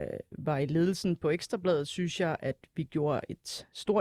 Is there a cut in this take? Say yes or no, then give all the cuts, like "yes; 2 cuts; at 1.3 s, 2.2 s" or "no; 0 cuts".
no; 0 cuts